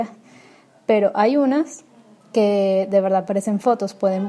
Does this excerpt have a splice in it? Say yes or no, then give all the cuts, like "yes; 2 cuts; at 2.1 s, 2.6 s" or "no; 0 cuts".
no; 0 cuts